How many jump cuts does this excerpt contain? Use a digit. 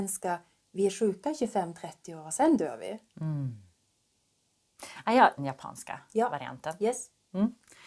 1